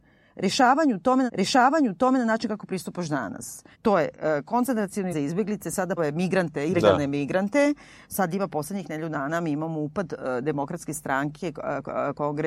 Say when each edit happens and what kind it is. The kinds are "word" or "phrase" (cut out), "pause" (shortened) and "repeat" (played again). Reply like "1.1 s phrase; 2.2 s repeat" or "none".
1.3 s repeat; 3.7 s pause; 5.1 s word; 6.0 s phrase

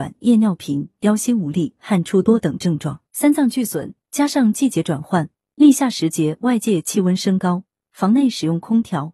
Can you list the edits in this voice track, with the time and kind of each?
3.1 s pause

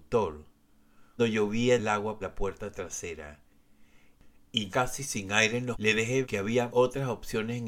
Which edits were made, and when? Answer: 1.2 s word; 1.8 s word; 2.2 s word; 4.7 s word; 5.7 s word; 6.2 s word; 6.7 s word

